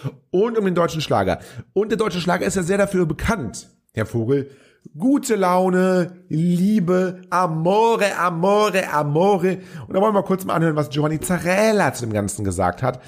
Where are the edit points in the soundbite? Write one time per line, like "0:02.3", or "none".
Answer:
none